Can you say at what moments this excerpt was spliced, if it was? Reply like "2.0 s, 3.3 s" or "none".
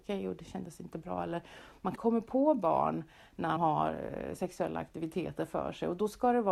2.0 s, 3.6 s